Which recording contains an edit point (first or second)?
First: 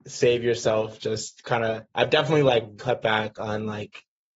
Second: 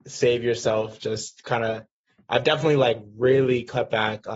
first